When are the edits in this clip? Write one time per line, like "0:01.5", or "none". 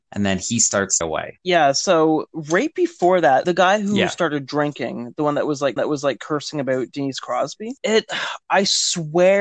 0:01.0
0:03.4
0:05.8